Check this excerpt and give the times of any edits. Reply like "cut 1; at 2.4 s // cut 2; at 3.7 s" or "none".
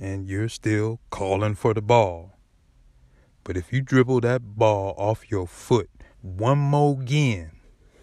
cut 1; at 6.1 s